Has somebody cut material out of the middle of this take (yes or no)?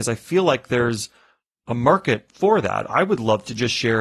no